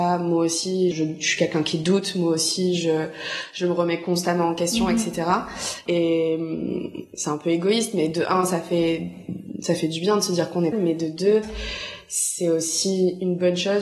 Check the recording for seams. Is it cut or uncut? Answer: cut